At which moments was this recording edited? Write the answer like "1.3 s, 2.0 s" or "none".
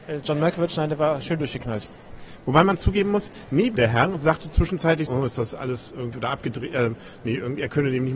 3.8 s, 5.1 s, 6.1 s